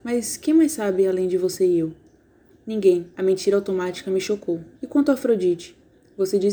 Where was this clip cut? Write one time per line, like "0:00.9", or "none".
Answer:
0:03.1
0:04.7